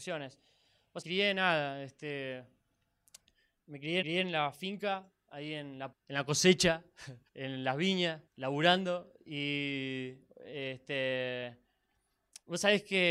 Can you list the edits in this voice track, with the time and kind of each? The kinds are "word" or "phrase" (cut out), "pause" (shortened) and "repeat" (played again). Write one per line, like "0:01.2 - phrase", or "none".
0:01.0 - phrase
0:04.0 - repeat
0:05.9 - word
0:07.3 - pause
0:08.3 - pause